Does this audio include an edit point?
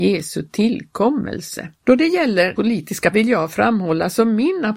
yes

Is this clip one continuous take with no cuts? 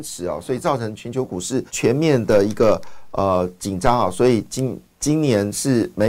no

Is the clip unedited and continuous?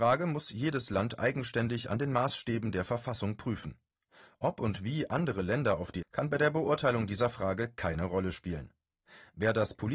no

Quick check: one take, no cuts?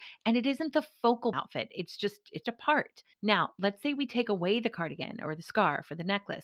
no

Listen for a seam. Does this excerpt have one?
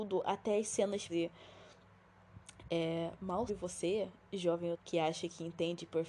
yes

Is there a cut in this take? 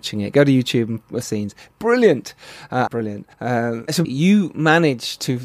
yes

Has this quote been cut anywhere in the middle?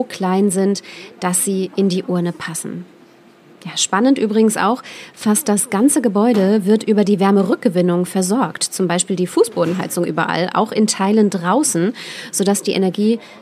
no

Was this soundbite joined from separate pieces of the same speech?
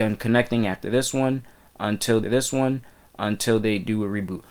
yes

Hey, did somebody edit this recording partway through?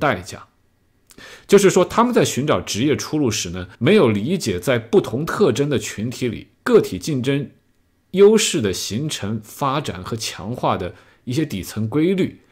yes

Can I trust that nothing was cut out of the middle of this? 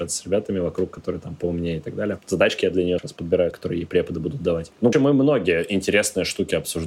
no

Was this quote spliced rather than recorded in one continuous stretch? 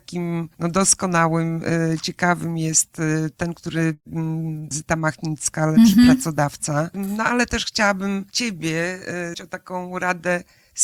yes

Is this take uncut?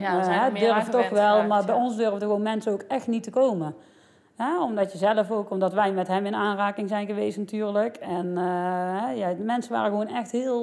yes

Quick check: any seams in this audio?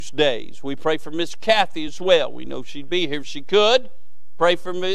no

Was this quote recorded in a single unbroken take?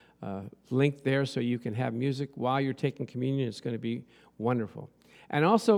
yes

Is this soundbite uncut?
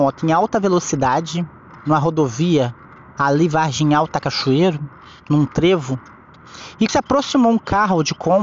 no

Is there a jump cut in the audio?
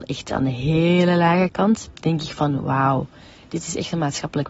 no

